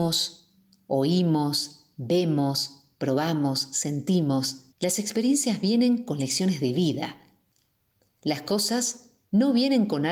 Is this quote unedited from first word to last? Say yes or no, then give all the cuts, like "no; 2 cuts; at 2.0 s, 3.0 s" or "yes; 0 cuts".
no; 1 cut; at 4.7 s